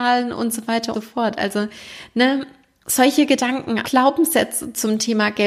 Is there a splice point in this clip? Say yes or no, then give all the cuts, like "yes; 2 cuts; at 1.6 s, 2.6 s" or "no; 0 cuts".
yes; 2 cuts; at 0.9 s, 3.8 s